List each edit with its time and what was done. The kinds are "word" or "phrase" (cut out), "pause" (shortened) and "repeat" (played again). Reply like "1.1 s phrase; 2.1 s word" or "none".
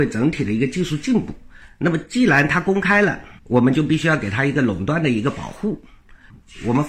3.4 s pause